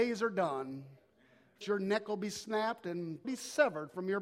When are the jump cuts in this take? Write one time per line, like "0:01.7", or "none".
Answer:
0:01.6
0:03.2